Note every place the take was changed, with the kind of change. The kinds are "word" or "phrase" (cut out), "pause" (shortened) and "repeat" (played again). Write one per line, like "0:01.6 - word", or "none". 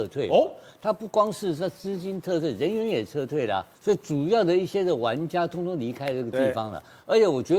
0:03.7 - pause